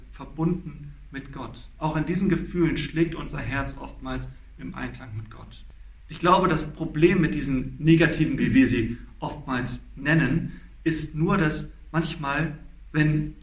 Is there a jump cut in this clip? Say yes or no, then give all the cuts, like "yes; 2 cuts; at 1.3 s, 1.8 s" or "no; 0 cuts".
yes; 1 cut; at 8.4 s